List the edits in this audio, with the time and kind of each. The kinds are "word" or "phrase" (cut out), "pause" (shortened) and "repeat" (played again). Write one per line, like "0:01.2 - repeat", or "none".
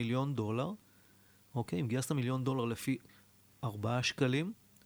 none